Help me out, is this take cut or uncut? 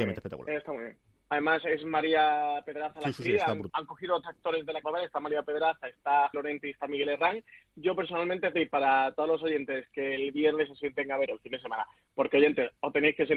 cut